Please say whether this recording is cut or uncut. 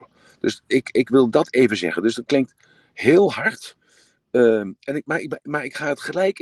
uncut